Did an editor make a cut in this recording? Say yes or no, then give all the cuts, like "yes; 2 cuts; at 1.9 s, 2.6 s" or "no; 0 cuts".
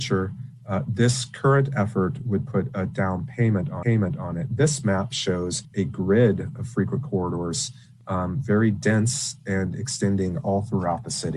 yes; 2 cuts; at 3.8 s, 5.6 s